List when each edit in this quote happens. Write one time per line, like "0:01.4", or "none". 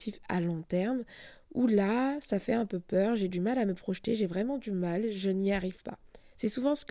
none